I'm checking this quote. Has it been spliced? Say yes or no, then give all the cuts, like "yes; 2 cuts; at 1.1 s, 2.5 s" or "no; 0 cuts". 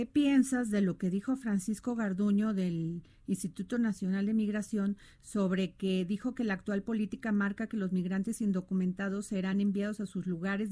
no; 0 cuts